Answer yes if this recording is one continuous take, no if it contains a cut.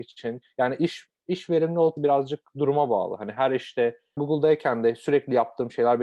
no